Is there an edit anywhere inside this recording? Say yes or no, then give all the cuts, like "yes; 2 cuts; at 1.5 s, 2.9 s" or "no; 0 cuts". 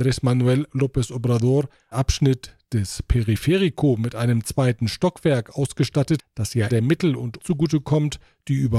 yes; 4 cuts; at 1.9 s, 6.2 s, 6.7 s, 7.4 s